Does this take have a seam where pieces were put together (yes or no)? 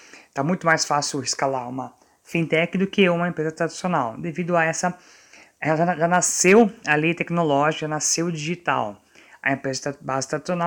no